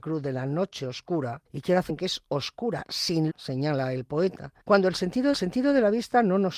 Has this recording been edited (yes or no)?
yes